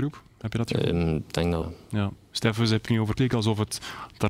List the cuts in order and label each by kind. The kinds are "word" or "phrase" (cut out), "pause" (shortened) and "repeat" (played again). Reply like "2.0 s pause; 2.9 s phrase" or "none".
1.6 s word; 2.9 s word; 3.2 s word